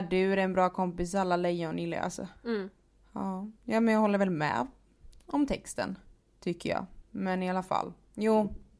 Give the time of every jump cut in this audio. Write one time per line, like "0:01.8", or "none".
0:02.4
0:03.5
0:06.1
0:07.0